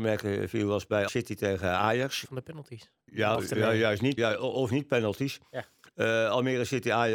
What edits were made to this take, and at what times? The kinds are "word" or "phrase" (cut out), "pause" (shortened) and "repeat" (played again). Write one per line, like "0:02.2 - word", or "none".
0:01.1 - word
0:02.2 - word
0:03.3 - word
0:04.2 - word
0:04.7 - word